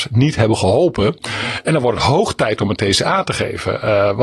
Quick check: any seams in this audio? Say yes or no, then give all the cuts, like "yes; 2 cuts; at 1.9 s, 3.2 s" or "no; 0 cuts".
no; 0 cuts